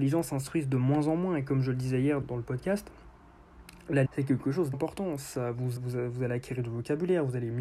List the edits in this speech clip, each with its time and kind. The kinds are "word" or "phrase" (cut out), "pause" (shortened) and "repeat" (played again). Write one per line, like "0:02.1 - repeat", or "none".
0:02.2 - word
0:04.1 - word
0:04.7 - word
0:05.8 - word